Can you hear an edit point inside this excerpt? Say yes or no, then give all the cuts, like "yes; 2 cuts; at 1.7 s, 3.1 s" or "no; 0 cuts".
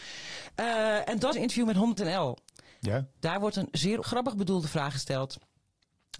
yes; 3 cuts; at 1.3 s, 2.0 s, 4.0 s